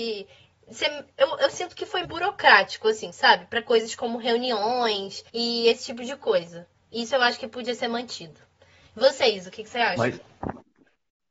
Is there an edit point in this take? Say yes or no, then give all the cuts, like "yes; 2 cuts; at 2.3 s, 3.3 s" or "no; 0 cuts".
yes; 2 cuts; at 2.0 s, 5.3 s